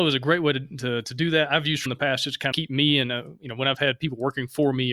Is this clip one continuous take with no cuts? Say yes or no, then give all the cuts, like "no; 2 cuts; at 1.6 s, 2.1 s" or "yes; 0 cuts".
no; 2 cuts; at 1.9 s, 2.5 s